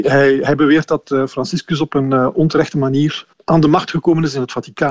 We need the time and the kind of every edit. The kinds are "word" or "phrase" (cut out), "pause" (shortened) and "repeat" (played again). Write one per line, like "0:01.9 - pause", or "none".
0:03.3 - pause